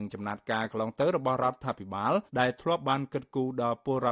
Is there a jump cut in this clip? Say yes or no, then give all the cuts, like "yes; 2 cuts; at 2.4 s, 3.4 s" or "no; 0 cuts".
yes; 1 cut; at 2.3 s